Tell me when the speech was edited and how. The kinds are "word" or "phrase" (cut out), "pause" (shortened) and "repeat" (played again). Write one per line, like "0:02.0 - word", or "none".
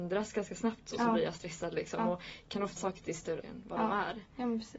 0:02.8 - word
0:03.4 - word